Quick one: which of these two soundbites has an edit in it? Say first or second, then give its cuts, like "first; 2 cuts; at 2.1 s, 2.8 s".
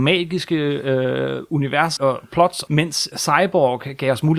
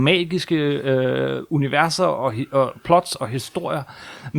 first; 3 cuts; at 2.0 s, 2.7 s, 3.1 s